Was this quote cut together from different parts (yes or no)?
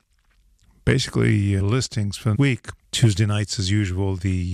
yes